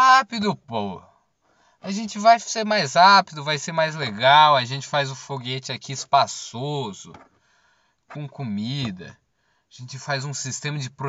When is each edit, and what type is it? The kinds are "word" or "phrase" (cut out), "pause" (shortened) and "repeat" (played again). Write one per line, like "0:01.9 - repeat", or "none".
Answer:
none